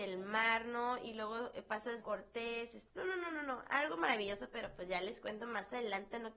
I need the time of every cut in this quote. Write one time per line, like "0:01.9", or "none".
0:02.0
0:02.9